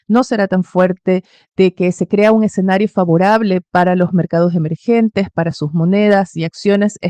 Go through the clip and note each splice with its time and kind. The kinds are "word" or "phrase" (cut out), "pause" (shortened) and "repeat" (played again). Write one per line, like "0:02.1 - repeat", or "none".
none